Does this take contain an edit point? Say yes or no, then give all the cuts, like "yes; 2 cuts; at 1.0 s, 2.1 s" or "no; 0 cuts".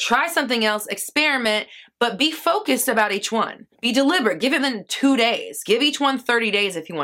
yes; 2 cuts; at 3.7 s, 4.6 s